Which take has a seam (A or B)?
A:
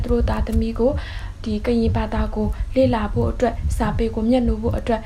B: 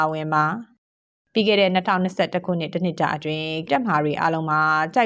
B